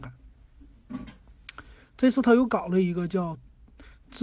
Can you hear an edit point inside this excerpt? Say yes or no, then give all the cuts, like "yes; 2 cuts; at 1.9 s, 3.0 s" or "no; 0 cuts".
no; 0 cuts